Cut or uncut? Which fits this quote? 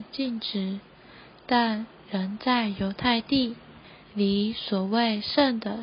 cut